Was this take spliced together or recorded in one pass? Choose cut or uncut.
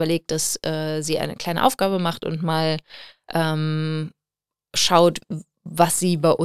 uncut